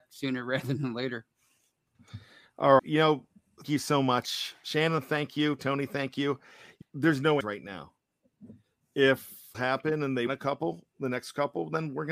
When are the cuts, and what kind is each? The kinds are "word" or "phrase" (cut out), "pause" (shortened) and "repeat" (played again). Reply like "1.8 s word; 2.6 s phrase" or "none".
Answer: 2.8 s word; 3.6 s word; 6.8 s word; 7.4 s word; 9.5 s word; 10.3 s word